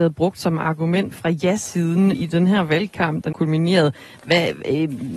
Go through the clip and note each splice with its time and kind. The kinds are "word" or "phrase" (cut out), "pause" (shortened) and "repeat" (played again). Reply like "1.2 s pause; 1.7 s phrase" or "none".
1.1 s word; 2.1 s word; 3.3 s word